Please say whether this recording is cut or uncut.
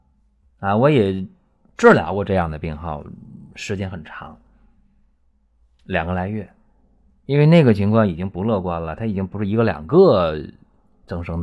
uncut